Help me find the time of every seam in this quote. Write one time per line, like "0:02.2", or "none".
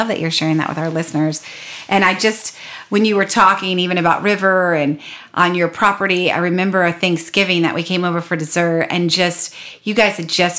none